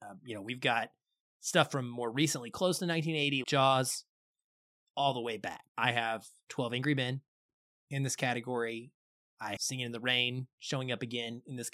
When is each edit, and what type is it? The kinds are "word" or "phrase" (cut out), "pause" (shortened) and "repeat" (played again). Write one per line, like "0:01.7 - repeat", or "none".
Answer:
0:03.4 - word
0:05.7 - word
0:09.6 - word